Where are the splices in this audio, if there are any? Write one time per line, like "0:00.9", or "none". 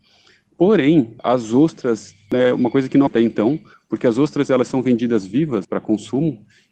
0:01.2
0:03.1
0:03.7
0:05.6

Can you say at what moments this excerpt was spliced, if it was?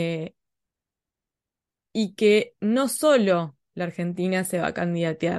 none

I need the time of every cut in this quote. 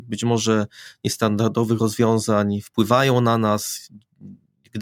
none

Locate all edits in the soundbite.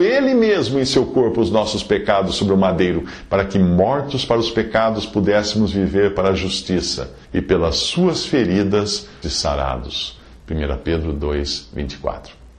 0:07.2
0:09.2

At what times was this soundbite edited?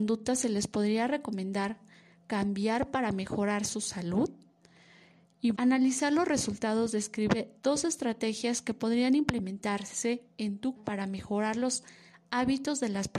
0:05.5
0:10.8

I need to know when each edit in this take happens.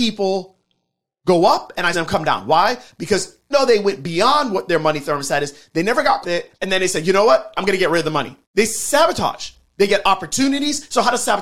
0:01.9
0:03.5
0:06.2
0:06.5
0:08.4

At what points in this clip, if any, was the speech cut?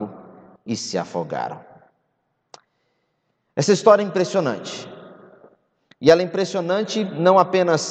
none

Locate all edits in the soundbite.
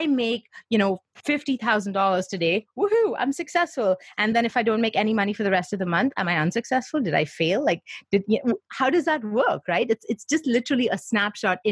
none

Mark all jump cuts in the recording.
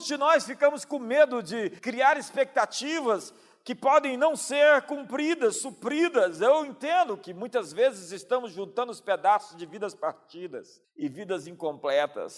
0:01.8
0:10.8

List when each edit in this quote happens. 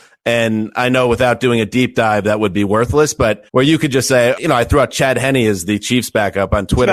0:03.5
0:04.4

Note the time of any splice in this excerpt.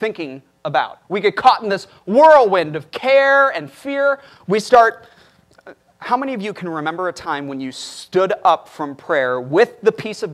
0:01.0

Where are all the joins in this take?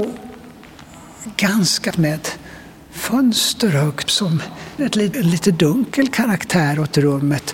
0:01.9
0:04.1
0:04.8
0:05.1

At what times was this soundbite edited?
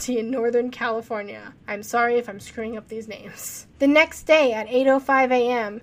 0:01.6
0:03.7

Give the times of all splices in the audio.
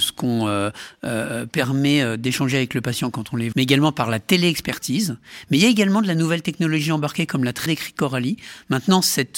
0:03.5
0:07.7

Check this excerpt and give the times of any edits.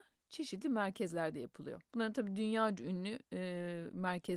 0:01.8

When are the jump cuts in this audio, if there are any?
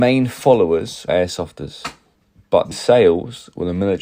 0:01.1
0:02.1
0:02.7

